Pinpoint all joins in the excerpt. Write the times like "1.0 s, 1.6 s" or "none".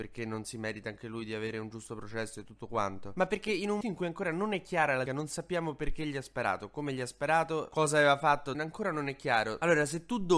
3.8 s, 5.1 s, 8.5 s